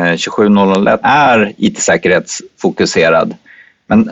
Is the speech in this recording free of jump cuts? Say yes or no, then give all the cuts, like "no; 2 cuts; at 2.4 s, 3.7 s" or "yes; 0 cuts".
no; 1 cut; at 1.0 s